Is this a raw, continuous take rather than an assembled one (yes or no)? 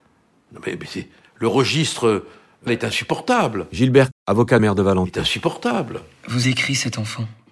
no